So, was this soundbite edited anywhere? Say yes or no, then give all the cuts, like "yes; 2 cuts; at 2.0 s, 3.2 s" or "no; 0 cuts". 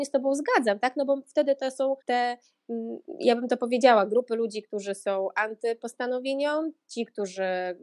yes; 1 cut; at 2.0 s